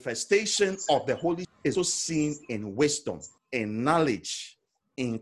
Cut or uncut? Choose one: cut